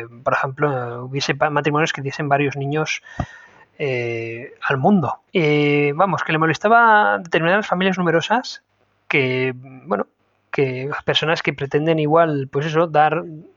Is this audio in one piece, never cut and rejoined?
no; 1 cut; at 5.3 s

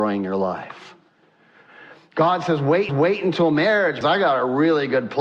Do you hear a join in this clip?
yes; 2 cuts; at 2.9 s, 4.0 s

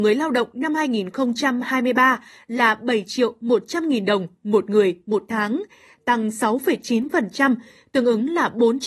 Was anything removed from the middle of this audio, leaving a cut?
no; 0 cuts

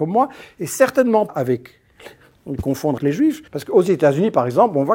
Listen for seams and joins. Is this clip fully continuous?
no; 3 cuts; at 1.3 s, 3.0 s, 3.5 s

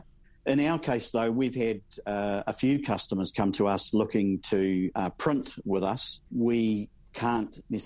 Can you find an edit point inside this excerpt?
yes; 1 cut; at 6.3 s

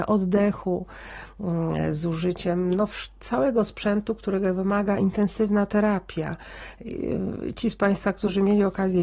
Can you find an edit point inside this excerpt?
no; 0 cuts

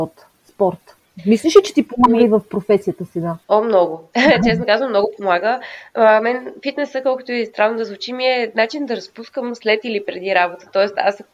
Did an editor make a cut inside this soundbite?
yes; 1 cut; at 3.4 s

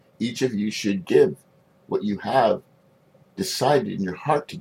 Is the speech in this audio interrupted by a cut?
no; 0 cuts

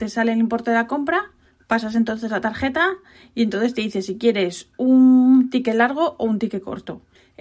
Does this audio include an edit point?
no; 0 cuts

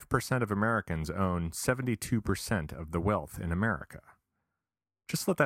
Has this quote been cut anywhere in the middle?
no; 0 cuts

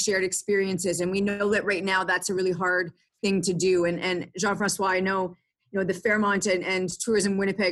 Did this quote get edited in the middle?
no; 0 cuts

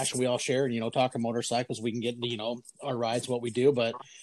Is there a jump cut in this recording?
no; 0 cuts

